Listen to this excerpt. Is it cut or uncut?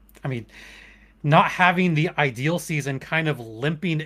uncut